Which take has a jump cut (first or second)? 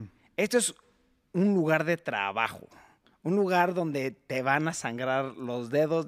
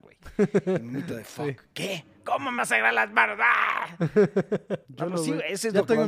second